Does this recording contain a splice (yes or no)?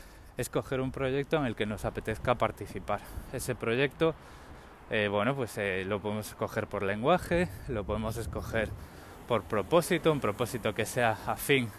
no